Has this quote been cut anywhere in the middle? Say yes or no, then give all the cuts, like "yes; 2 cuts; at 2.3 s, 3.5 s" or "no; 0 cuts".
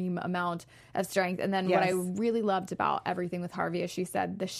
no; 0 cuts